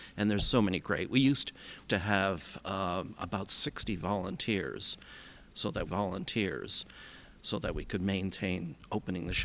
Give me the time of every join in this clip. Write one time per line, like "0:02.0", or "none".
0:01.9
0:05.9